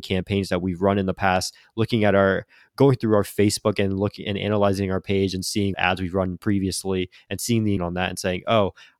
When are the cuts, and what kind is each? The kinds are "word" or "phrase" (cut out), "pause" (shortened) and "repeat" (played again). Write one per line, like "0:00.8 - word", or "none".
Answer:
0:05.7 - word
0:07.8 - word